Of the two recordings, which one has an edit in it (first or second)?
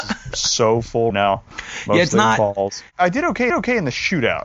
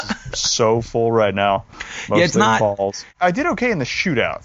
first